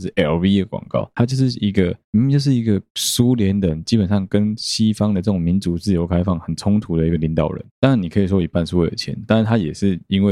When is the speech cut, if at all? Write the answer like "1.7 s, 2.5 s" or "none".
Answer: 7.7 s